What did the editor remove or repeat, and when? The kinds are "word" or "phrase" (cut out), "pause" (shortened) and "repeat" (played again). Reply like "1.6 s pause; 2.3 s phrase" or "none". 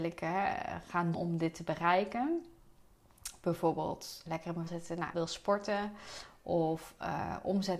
1.1 s word; 4.3 s word; 4.7 s word; 5.1 s word